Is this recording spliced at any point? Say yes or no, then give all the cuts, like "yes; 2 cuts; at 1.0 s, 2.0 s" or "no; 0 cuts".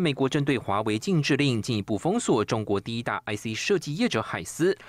no; 0 cuts